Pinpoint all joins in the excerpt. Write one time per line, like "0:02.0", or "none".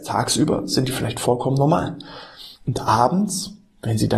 0:02.5